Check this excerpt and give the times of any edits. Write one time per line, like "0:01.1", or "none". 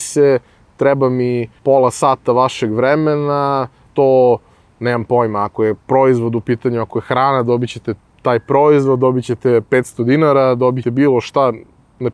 0:01.6
0:03.9
0:05.8
0:10.8

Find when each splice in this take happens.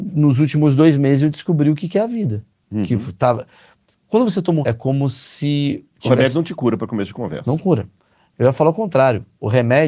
0:04.6

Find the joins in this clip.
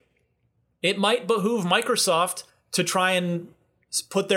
0:02.5

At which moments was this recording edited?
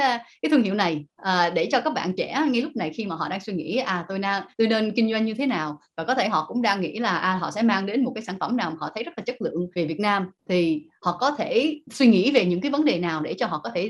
0:01.1
0:09.7

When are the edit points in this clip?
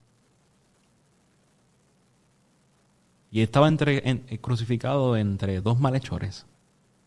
none

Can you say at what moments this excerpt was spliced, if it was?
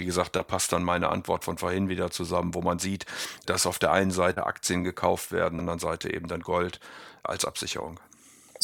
0:05.6

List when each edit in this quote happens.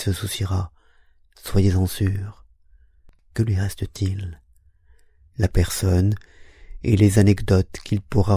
none

